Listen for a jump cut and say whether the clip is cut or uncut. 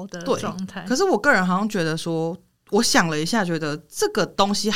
uncut